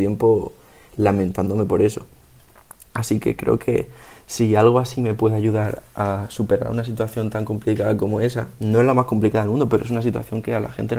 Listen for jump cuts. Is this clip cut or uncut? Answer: uncut